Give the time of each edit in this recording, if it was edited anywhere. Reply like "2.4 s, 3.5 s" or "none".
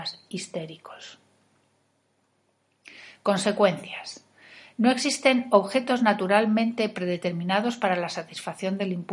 none